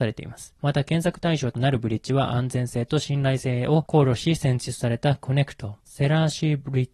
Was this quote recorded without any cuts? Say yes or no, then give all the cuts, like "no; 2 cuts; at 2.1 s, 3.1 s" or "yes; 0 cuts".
no; 1 cut; at 5.8 s